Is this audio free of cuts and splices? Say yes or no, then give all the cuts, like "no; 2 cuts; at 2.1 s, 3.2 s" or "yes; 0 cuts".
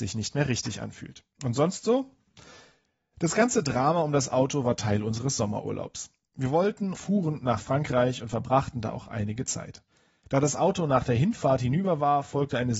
no; 2 cuts; at 1.3 s, 6.9 s